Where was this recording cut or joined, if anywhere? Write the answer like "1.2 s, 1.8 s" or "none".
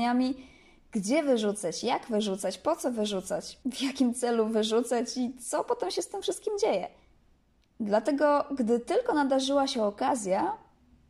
3.6 s